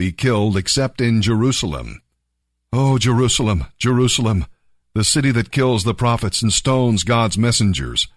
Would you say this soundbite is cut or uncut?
uncut